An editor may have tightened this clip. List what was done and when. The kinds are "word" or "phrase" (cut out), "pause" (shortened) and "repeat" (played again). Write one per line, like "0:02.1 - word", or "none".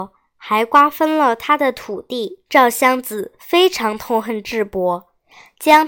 0:02.5 - pause